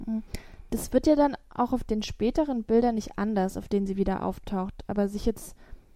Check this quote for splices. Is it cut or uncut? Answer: uncut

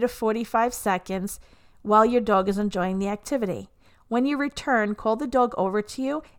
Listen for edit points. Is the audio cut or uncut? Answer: uncut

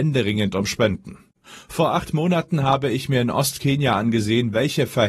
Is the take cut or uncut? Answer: uncut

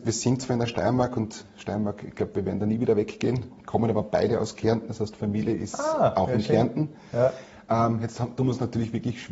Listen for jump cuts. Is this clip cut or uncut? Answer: uncut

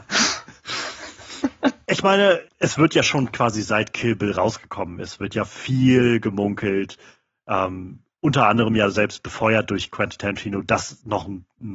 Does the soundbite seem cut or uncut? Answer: uncut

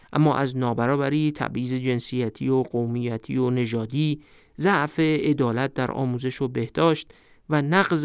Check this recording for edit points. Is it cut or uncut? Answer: uncut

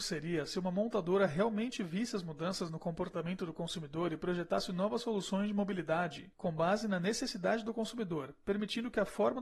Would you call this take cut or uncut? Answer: uncut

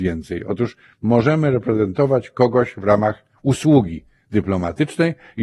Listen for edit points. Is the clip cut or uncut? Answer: uncut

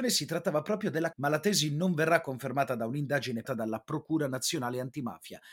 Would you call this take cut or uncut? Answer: cut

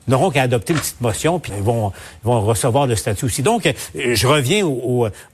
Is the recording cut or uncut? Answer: cut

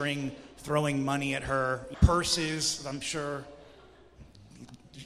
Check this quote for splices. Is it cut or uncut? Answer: cut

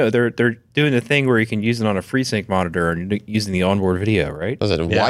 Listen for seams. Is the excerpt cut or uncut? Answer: uncut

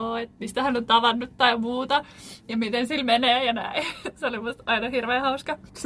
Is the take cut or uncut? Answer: uncut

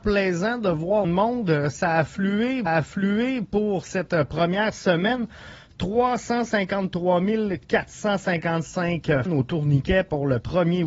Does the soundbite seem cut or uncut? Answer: cut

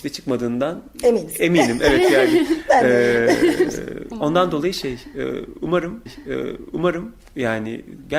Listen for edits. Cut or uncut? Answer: cut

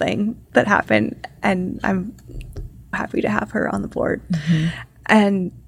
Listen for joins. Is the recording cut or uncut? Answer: cut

